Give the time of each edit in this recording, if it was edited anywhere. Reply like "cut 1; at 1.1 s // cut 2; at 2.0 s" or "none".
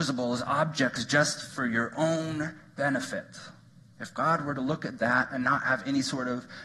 cut 1; at 3.7 s